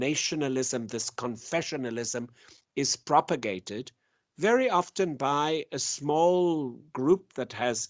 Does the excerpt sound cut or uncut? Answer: uncut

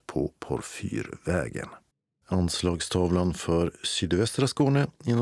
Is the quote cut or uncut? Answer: cut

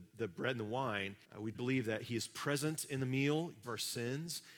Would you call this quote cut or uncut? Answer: cut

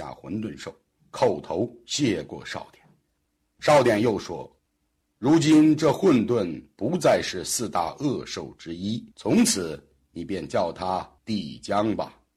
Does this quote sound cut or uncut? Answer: cut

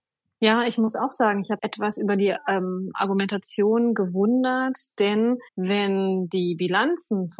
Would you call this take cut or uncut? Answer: cut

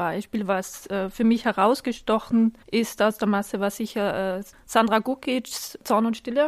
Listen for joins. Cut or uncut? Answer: cut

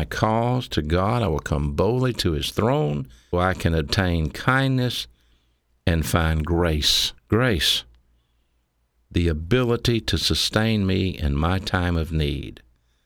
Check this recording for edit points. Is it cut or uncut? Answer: cut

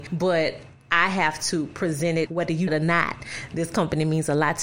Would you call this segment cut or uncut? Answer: cut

